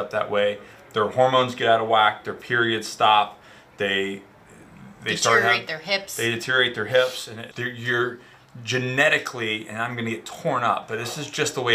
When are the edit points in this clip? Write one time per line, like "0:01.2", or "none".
0:07.5

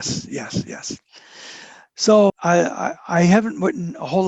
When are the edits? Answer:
0:02.3

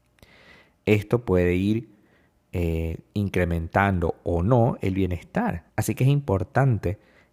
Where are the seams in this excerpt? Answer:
0:05.7

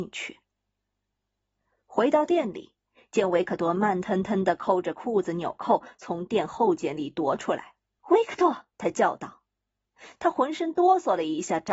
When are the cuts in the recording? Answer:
0:07.9
0:08.7

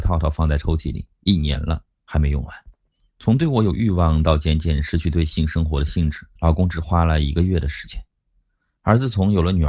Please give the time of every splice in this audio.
0:02.9
0:06.4

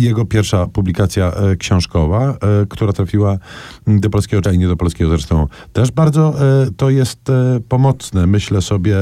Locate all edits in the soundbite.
0:04.4

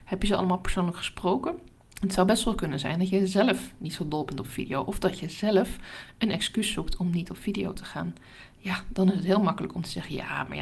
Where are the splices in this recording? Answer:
0:01.8

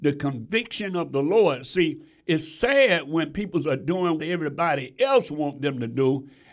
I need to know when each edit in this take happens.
0:04.2

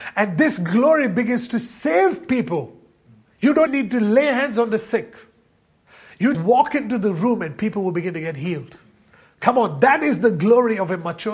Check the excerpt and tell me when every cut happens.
0:03.7
0:06.3

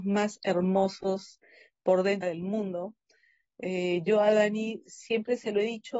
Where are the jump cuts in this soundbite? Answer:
0:02.2

